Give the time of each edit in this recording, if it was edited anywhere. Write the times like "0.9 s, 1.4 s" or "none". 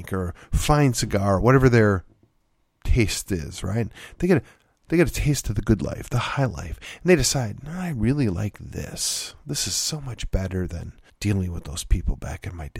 11.1 s